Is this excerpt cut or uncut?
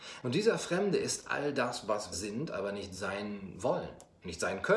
cut